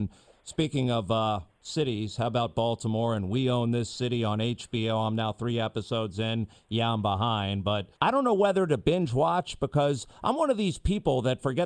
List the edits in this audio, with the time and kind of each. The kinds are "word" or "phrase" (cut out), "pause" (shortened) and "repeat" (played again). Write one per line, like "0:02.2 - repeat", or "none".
0:08.0 - pause